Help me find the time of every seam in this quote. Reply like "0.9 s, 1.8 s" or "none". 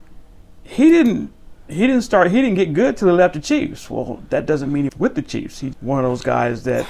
4.9 s, 5.7 s